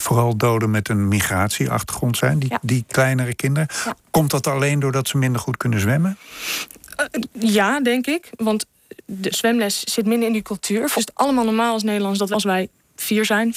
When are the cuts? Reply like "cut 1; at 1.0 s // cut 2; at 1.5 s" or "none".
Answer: cut 1; at 9.3 s // cut 2; at 11.0 s // cut 3; at 12.3 s